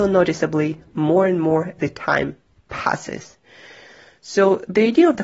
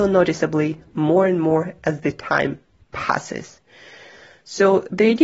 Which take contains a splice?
first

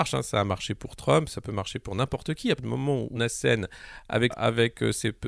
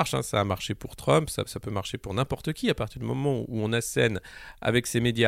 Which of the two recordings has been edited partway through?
first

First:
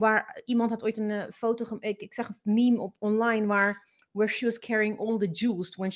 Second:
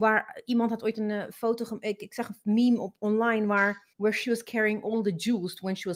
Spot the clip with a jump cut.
second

